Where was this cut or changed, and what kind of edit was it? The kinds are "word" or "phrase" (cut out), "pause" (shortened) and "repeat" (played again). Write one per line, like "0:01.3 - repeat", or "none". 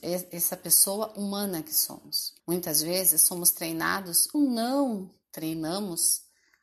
0:02.4 - pause
0:04.3 - word
0:05.2 - pause